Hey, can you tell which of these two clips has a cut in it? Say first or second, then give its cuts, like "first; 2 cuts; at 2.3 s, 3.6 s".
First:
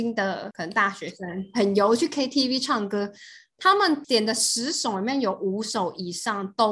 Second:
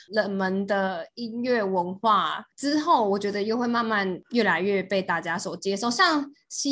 second; 1 cut; at 2.5 s